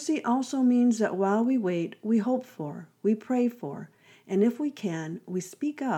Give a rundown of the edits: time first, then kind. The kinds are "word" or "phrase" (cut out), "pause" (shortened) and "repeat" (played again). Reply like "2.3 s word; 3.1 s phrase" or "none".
none